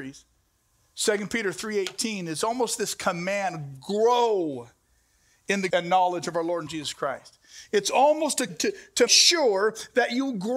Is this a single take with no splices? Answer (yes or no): no